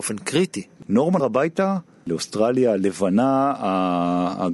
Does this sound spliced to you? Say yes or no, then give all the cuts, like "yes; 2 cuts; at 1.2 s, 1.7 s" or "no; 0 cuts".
yes; 1 cut; at 1.2 s